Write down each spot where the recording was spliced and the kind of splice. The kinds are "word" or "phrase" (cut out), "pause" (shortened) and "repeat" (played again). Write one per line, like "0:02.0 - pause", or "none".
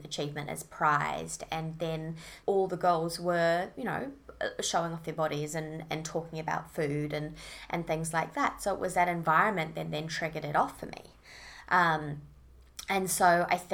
0:02.4 - pause